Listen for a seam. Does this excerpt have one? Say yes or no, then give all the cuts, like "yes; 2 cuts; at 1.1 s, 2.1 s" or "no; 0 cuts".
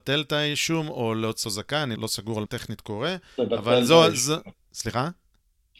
yes; 3 cuts; at 1.4 s, 2.0 s, 2.5 s